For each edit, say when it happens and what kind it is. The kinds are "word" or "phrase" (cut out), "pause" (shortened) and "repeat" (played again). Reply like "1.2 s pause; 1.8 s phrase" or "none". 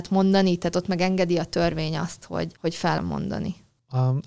2.6 s pause; 3.0 s word